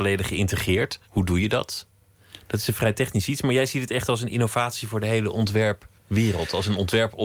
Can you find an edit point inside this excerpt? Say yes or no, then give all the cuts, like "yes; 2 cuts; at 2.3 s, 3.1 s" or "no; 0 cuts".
yes; 2 cuts; at 1.0 s, 6.0 s